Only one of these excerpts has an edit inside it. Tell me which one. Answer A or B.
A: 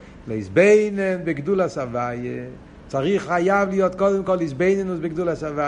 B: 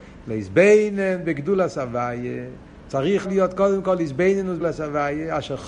B